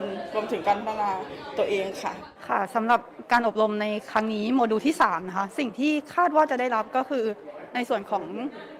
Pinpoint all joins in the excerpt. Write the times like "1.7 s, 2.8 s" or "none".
2.4 s